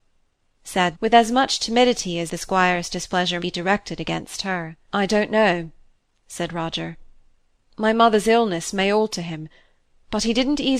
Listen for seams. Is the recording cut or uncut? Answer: cut